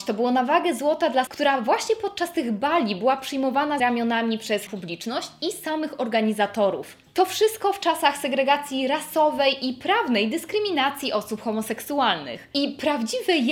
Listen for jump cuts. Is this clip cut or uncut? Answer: cut